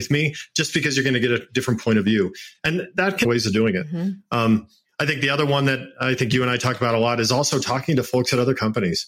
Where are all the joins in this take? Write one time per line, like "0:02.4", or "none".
0:03.2